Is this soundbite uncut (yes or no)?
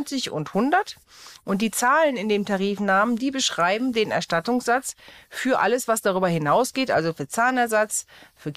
yes